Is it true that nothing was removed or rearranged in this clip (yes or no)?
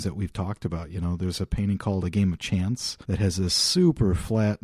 no